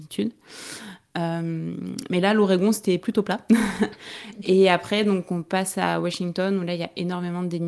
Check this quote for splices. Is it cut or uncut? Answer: uncut